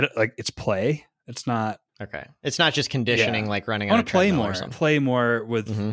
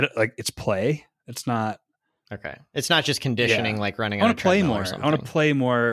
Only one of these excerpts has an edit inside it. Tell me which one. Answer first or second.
first